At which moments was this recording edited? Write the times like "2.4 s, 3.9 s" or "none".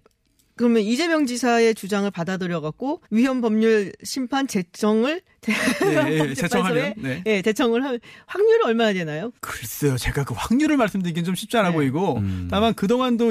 3.0 s, 5.3 s, 9.4 s